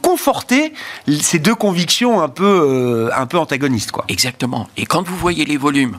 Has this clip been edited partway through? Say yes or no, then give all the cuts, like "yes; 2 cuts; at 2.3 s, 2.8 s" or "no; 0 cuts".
no; 0 cuts